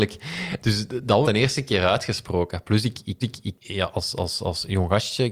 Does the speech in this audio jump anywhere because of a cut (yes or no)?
yes